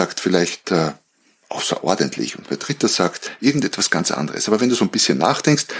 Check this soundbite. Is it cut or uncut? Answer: uncut